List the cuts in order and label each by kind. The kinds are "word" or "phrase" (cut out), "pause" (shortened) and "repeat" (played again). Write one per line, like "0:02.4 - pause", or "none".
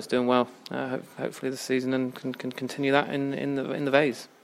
none